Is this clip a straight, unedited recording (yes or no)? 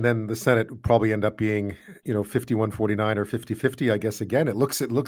yes